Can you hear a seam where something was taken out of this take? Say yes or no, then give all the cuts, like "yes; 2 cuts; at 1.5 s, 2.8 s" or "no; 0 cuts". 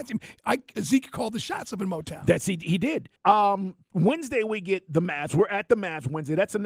yes; 1 cut; at 3.2 s